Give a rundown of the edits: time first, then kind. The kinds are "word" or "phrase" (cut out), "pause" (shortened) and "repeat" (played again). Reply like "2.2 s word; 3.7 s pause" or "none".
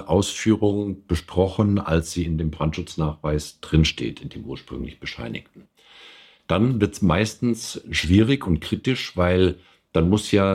none